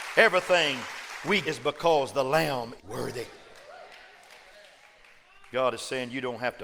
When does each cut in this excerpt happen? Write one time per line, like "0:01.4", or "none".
0:01.4
0:02.8